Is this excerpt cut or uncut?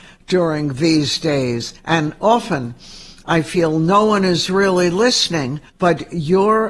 cut